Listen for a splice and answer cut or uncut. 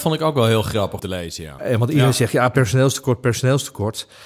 cut